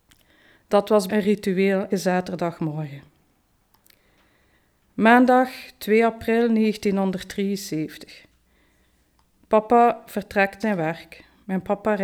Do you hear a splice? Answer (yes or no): yes